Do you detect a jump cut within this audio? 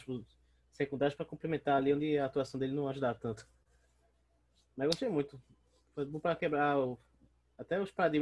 no; 0 cuts

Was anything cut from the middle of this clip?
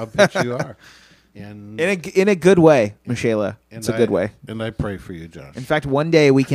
no; 0 cuts

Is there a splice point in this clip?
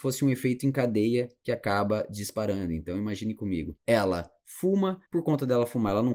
yes; 2 cuts; at 3.8 s, 5.1 s

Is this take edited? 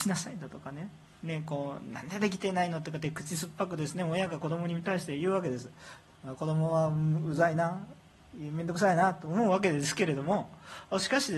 no; 0 cuts

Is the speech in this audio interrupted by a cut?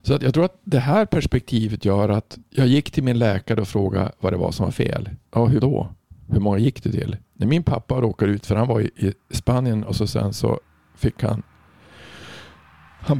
yes; 4 cuts; at 2.4 s, 5.3 s, 5.6 s, 7.2 s

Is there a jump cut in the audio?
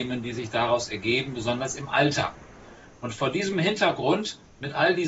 no; 0 cuts

